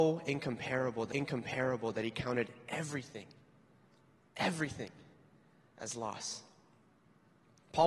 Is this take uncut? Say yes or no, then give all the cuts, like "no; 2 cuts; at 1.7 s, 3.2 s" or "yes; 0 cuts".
no; 1 cut; at 1.1 s